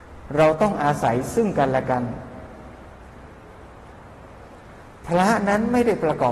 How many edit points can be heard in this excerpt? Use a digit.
0